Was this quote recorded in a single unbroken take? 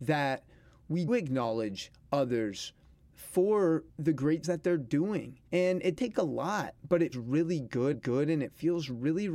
no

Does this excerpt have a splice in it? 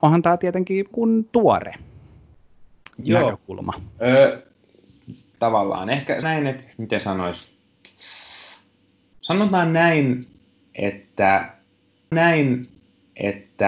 yes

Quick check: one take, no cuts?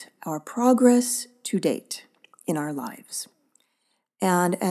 yes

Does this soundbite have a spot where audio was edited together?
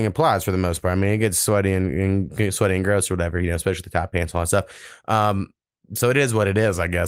no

